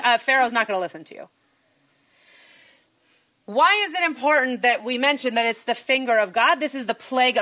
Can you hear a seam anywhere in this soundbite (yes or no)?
no